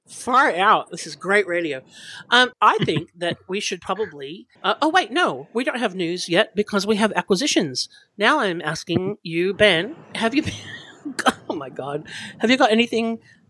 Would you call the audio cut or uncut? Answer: cut